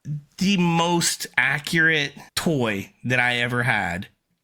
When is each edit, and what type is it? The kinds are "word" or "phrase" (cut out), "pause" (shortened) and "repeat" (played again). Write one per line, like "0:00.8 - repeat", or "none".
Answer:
0:02.3 - pause